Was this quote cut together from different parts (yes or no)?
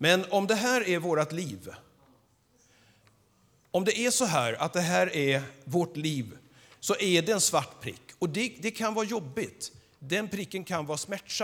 no